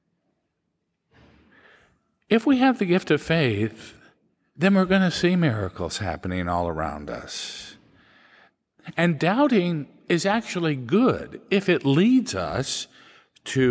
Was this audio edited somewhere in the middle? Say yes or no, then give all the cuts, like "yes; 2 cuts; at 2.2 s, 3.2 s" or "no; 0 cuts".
no; 0 cuts